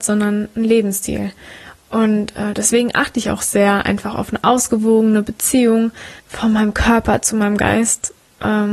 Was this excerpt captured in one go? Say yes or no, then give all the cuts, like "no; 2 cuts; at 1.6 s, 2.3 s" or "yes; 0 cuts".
no; 1 cut; at 6.2 s